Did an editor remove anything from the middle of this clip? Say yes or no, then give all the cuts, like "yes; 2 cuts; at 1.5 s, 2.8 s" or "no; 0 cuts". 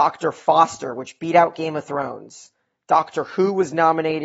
no; 0 cuts